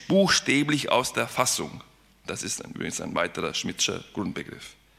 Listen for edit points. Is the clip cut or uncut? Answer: uncut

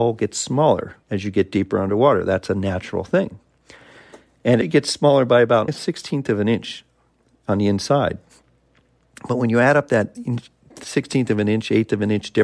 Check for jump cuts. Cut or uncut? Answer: cut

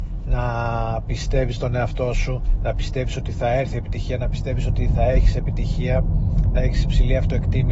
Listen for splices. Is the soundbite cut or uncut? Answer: uncut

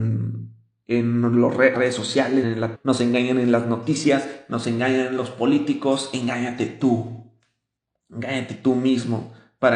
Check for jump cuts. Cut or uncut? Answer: cut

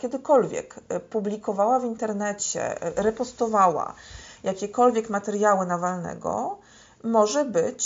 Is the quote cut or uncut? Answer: uncut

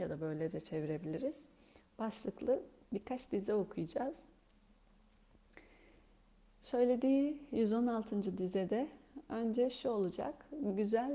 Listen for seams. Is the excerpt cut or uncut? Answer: uncut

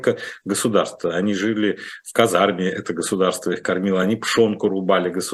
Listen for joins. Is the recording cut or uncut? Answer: uncut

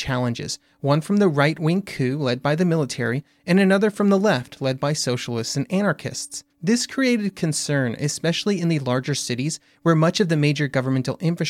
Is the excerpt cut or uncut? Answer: cut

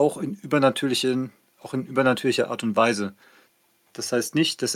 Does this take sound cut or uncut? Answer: uncut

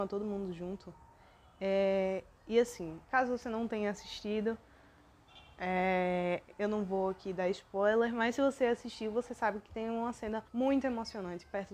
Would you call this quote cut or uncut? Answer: cut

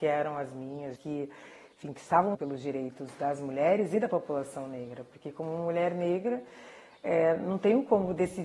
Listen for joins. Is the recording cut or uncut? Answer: cut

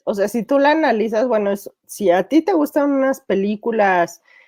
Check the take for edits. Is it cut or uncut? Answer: uncut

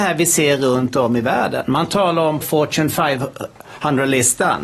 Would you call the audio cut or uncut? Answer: cut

